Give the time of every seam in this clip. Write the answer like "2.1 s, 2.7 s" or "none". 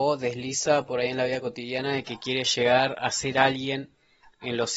none